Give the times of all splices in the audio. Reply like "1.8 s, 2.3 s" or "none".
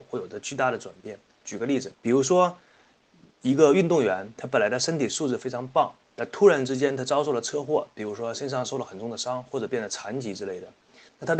1.9 s